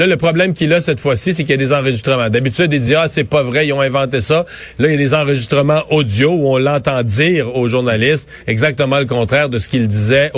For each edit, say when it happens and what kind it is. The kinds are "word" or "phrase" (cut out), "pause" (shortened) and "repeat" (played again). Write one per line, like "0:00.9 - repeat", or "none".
none